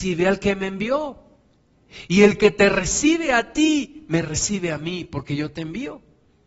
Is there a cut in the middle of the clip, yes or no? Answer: no